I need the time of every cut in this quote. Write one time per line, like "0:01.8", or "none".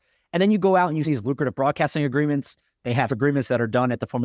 0:01.0
0:03.1